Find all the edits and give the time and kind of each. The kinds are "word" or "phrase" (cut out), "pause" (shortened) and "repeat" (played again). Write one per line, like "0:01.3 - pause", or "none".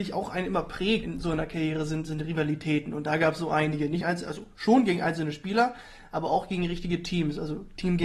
0:01.0 - word
0:04.0 - phrase